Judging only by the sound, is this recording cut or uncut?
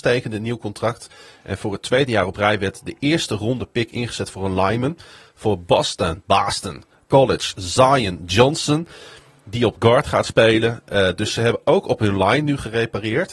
uncut